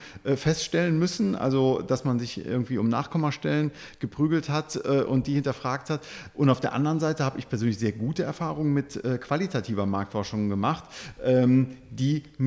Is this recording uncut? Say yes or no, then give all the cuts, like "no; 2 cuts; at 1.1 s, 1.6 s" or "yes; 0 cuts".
yes; 0 cuts